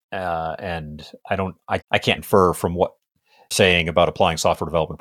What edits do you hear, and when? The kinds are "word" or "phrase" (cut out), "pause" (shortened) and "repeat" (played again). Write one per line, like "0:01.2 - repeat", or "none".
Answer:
0:01.8 - word
0:02.2 - word
0:03.5 - word